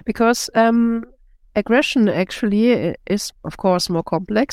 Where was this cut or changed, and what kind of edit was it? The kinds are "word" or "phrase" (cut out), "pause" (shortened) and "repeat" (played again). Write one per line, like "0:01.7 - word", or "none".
none

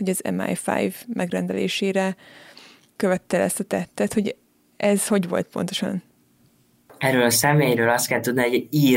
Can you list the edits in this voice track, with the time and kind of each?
none

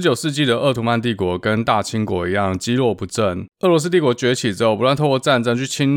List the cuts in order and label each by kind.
0:03.5 - pause

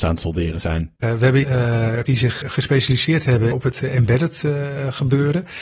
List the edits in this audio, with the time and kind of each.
0:01.0 - pause
0:01.4 - word
0:02.1 - word
0:02.4 - word
0:03.5 - word

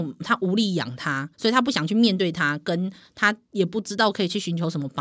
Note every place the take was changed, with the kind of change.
0:01.3 - pause
0:03.4 - pause

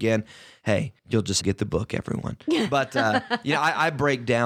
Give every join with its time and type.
0:01.0 - pause
0:01.4 - phrase

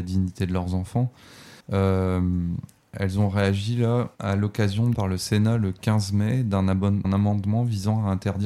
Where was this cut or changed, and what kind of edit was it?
0:01.6 - pause
0:04.1 - pause
0:04.9 - word
0:07.0 - word

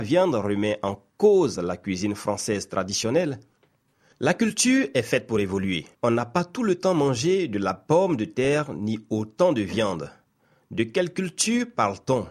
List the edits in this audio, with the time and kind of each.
0:05.9 - pause

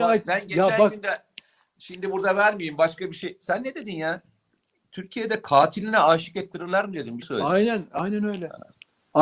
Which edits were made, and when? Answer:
0:07.2 - word
0:07.9 - word

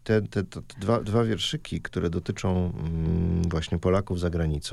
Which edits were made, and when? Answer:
none

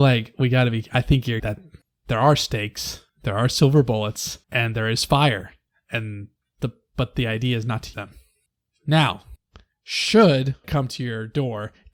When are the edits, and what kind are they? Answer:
0:01.4 - phrase
0:04.4 - pause
0:07.9 - word
0:10.6 - word

